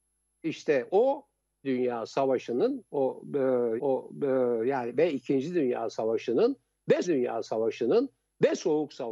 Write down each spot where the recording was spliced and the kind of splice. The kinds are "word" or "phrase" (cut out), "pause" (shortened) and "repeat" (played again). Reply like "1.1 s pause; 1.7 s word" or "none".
1.6 s word; 3.8 s repeat; 7.0 s repeat